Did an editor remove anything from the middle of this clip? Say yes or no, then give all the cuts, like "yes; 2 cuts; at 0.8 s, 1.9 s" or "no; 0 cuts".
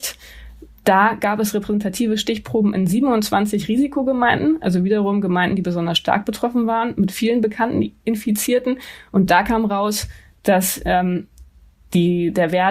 no; 0 cuts